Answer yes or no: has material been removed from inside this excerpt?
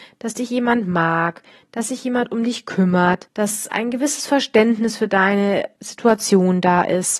no